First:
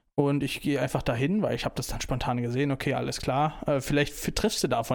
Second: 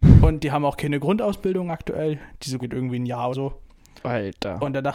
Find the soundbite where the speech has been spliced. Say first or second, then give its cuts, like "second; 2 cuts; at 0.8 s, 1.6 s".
second; 2 cuts; at 2.6 s, 3.3 s